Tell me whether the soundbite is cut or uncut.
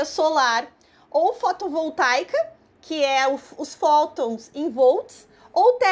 uncut